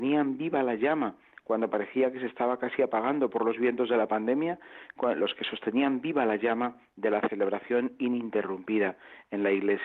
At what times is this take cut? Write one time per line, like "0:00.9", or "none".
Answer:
none